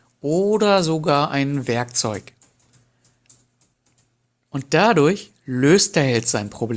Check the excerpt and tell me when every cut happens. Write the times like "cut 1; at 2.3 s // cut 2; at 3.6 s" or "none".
none